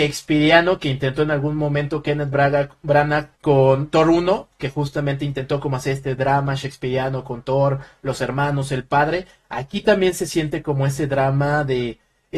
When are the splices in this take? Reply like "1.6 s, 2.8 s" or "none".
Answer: 3.3 s